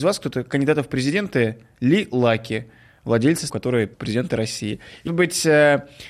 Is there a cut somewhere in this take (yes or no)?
yes